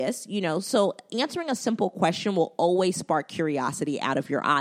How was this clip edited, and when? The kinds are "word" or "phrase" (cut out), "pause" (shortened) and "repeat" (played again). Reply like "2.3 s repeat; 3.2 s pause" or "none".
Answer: none